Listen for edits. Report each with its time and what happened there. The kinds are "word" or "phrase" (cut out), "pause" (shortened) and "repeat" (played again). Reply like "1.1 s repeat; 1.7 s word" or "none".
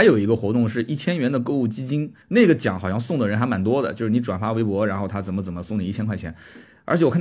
2.2 s pause